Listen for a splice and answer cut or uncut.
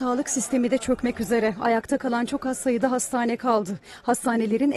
uncut